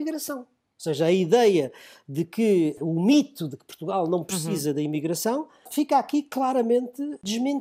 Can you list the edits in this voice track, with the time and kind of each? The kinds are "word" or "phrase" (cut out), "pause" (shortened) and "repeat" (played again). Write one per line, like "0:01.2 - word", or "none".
none